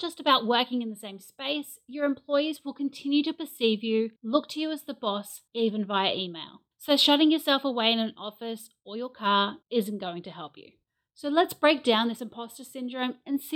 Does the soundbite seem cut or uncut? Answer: cut